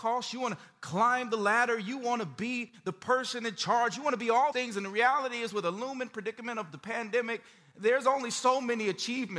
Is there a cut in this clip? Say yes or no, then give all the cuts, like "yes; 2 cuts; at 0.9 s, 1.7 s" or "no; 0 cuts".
yes; 1 cut; at 4.5 s